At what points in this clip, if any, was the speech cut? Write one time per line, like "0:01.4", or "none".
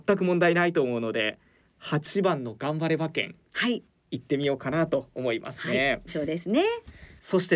0:06.1